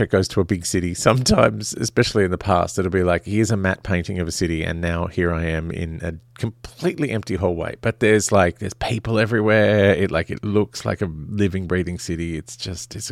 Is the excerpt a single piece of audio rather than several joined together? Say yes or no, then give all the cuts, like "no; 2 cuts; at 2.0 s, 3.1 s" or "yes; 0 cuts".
yes; 0 cuts